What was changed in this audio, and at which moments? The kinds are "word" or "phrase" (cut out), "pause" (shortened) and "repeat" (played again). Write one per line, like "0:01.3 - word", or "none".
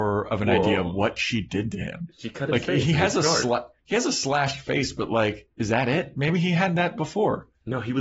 0:03.8 - pause
0:05.5 - pause